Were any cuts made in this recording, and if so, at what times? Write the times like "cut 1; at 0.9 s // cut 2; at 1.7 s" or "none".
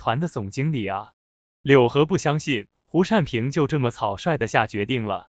none

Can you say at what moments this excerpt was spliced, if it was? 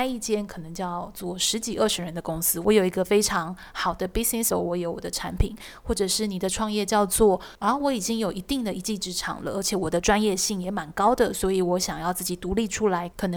cut 1; at 4.5 s

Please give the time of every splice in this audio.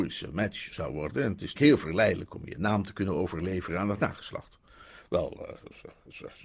cut 1; at 1.5 s

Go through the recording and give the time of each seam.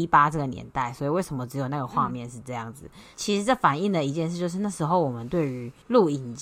none

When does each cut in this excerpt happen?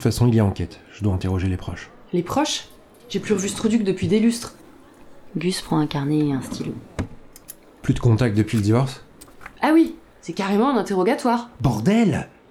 none

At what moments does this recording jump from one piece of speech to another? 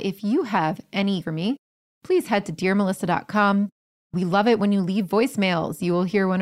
cut 1; at 1.2 s

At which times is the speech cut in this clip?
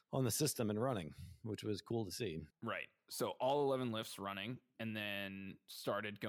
cut 1; at 2.5 s

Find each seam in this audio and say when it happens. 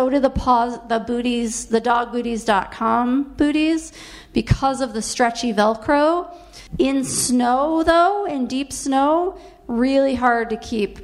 cut 1; at 6.7 s

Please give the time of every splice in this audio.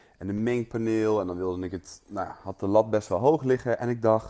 none

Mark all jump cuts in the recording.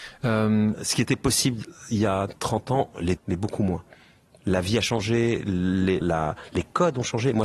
cut 1; at 3.2 s // cut 2; at 6.0 s

